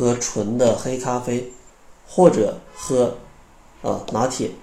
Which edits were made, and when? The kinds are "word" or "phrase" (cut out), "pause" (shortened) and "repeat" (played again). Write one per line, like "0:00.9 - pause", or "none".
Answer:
0:01.7 - pause